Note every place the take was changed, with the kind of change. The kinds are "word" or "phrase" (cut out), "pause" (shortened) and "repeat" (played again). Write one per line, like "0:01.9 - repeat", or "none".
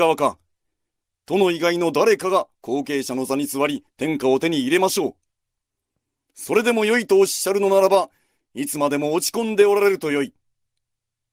0:03.9 - pause

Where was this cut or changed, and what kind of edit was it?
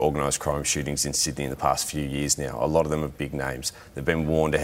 0:03.1 - word

